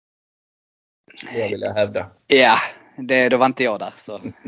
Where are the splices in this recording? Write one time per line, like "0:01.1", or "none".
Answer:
none